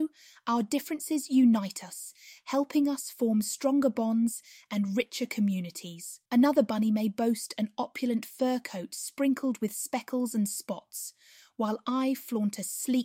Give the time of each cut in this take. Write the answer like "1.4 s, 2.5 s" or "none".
6.3 s